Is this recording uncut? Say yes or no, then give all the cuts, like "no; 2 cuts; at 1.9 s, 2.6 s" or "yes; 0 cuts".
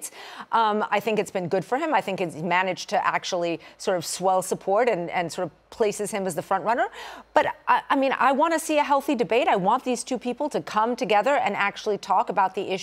yes; 0 cuts